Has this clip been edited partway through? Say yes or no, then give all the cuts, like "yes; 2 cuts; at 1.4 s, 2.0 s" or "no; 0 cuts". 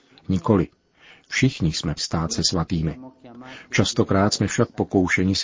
yes; 1 cut; at 2.0 s